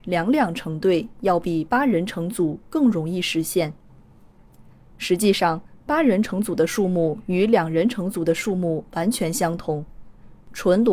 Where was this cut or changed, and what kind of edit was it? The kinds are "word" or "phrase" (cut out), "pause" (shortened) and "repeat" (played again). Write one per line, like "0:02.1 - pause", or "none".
none